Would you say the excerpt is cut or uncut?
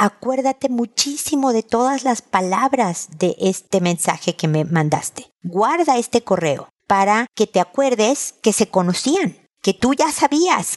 uncut